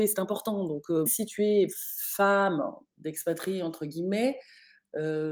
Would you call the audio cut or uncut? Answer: cut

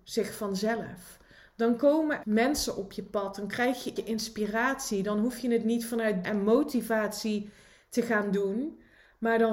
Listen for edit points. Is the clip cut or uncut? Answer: cut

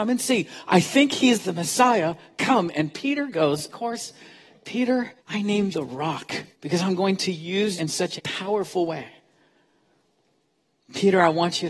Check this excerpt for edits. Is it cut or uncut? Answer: cut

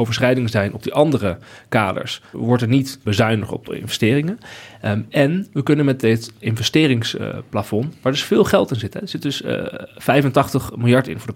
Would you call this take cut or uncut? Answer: cut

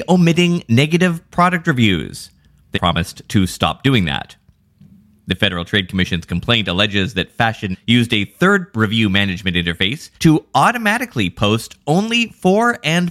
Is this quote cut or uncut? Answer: cut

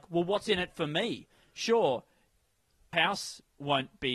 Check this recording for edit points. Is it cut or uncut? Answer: cut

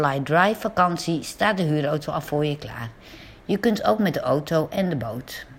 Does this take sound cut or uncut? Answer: uncut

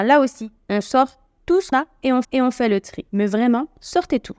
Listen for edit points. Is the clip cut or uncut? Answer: cut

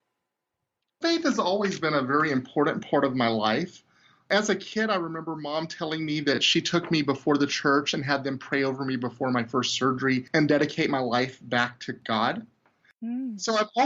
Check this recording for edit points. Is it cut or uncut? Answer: uncut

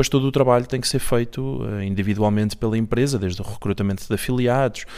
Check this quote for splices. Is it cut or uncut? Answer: uncut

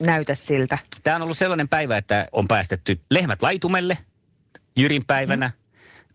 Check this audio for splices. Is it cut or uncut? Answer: cut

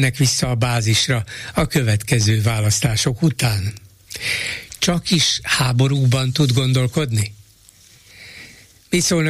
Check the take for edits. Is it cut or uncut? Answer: uncut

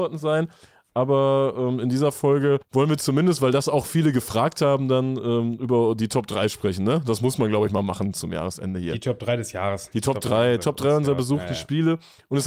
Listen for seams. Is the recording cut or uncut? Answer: cut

